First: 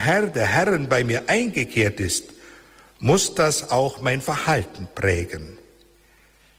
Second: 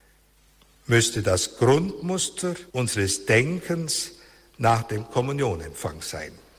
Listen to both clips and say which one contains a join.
second; 1 cut; at 2.7 s

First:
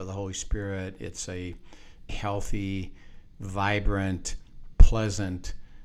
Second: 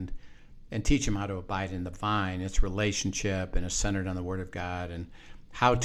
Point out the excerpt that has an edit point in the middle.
first; 1 cut; at 2.1 s

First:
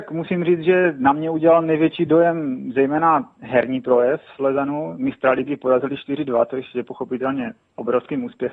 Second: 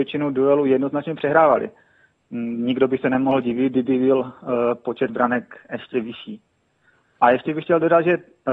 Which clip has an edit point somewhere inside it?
second; 1 cut; at 5.1 s

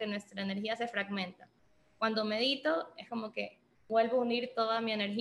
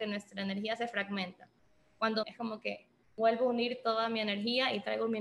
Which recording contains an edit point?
second; 1 cut; at 2.2 s

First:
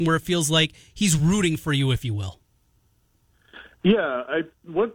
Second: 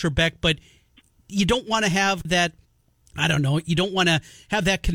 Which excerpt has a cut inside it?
second; 1 cut; at 2.2 s

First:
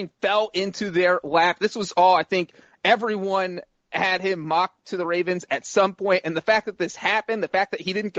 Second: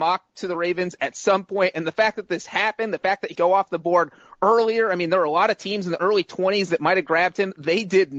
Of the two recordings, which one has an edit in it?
second; 1 cut; at 3.3 s

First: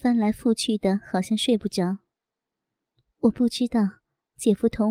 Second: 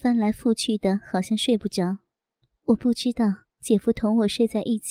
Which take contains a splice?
second; 2 cuts; at 2.4 s, 3.5 s

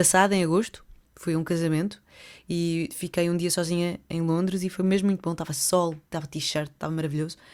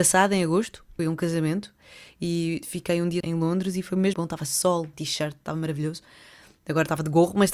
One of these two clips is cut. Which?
second; 4 cuts; at 1.0 s, 3.2 s, 4.1 s, 4.9 s

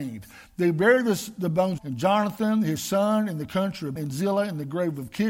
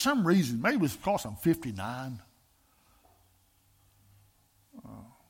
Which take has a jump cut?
first; 2 cuts; at 1.8 s, 4.0 s

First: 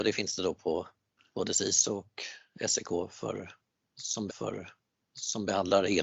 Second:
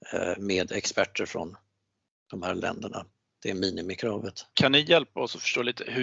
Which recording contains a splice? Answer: first; 1 cut; at 4.3 s

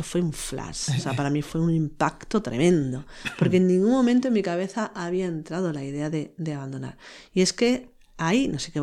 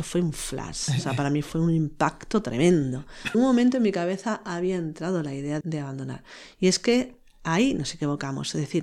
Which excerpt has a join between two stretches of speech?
second; 2 cuts; at 3.3 s, 5.6 s

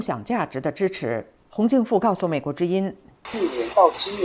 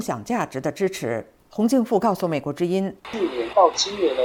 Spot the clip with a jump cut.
second; 1 cut; at 3.0 s

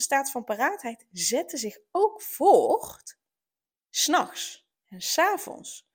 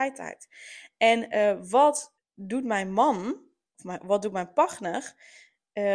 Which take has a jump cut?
second; 1 cut; at 2.2 s

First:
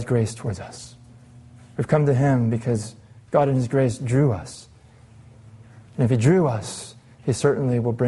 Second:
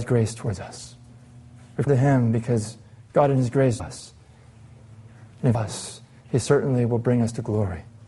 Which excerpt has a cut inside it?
second; 3 cuts; at 1.9 s, 3.8 s, 5.5 s

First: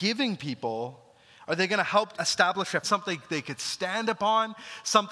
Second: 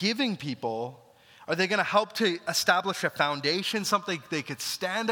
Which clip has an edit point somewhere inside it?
first; 2 cuts; at 2.1 s, 2.8 s

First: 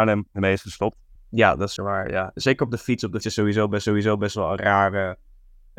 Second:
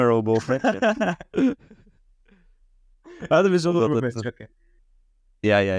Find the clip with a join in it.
first; 4 cuts; at 1.2 s, 1.8 s, 3.2 s, 3.8 s

